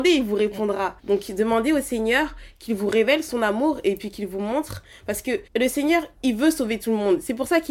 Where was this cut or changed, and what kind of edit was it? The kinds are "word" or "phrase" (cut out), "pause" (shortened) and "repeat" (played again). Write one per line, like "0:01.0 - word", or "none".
0:01.0 - pause
0:05.5 - pause